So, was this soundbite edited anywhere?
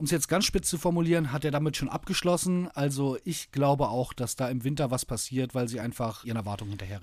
no; 0 cuts

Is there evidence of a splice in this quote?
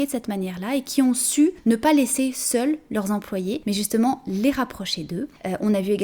no; 0 cuts

